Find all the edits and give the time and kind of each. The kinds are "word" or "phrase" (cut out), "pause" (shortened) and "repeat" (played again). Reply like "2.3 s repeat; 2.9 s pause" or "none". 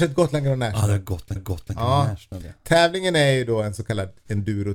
1.4 s repeat